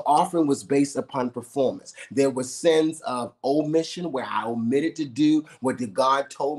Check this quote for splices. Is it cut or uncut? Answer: uncut